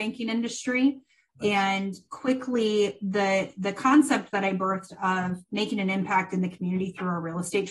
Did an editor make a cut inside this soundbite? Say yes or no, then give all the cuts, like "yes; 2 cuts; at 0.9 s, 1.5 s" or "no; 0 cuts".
no; 0 cuts